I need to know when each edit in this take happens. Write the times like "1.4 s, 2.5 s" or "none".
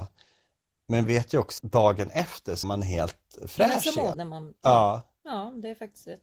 1.1 s, 1.6 s, 2.6 s, 4.1 s